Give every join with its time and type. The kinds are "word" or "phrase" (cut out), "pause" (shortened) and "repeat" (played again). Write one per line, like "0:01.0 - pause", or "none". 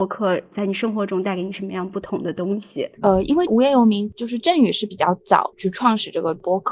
0:02.9 - pause